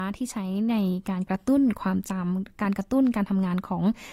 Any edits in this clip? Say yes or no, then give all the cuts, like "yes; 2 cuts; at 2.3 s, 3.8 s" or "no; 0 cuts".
no; 0 cuts